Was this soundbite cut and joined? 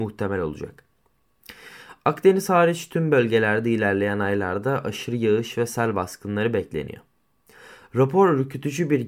no; 0 cuts

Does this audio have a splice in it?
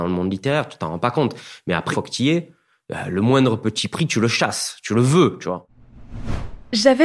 yes; 1 cut; at 1.9 s

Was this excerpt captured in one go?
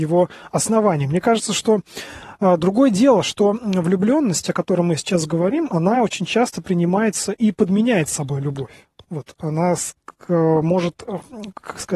yes; 0 cuts

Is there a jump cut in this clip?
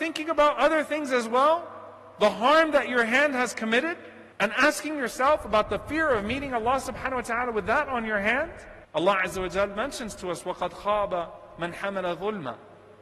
yes; 2 cuts; at 4.3 s, 8.8 s

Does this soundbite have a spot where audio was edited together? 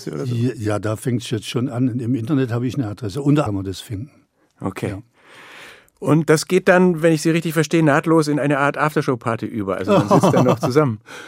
yes; 1 cut; at 3.5 s

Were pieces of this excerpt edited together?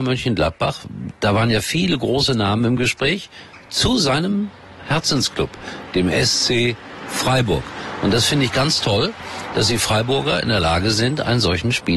no; 0 cuts

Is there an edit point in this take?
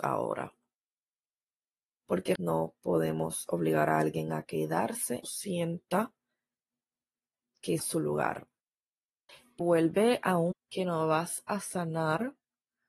yes; 5 cuts; at 2.4 s, 5.2 s, 7.8 s, 9.6 s, 10.5 s

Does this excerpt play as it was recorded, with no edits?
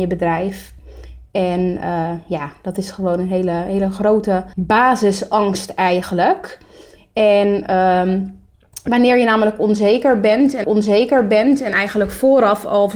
no; 2 cuts; at 4.5 s, 10.6 s

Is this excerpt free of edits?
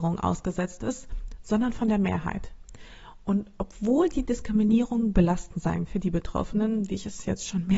no; 1 cut; at 5.9 s

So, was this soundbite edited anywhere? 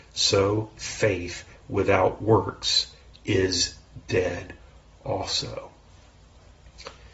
no; 0 cuts

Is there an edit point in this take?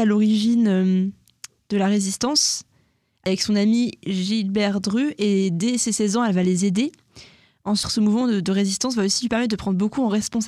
no; 0 cuts

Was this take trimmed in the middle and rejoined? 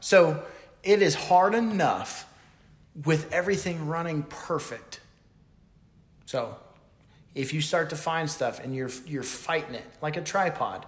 no; 0 cuts

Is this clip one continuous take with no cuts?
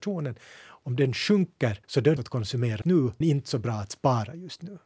no; 4 cuts; at 1.8 s, 2.2 s, 2.8 s, 3.2 s

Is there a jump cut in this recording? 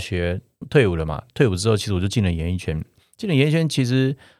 no; 0 cuts

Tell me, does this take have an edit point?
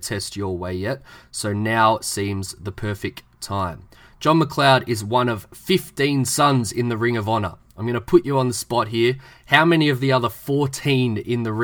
no; 0 cuts

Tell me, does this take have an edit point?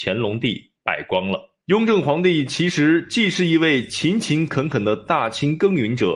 yes; 1 cut; at 1.6 s

